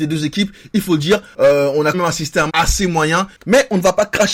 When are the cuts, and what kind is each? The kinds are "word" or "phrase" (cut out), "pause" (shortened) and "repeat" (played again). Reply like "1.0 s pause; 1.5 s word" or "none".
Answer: 1.9 s word; 2.5 s word